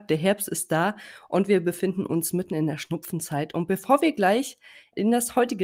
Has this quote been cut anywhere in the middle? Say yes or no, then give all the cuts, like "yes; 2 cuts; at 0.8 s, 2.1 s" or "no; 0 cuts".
no; 0 cuts